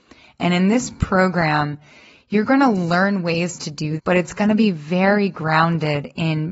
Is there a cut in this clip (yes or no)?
yes